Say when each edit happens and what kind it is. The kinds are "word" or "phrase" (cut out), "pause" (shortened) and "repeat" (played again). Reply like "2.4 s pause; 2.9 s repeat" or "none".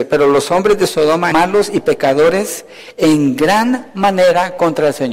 1.3 s word